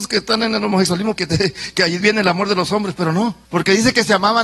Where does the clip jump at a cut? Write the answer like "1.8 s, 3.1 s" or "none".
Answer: 1.2 s, 2.0 s, 3.4 s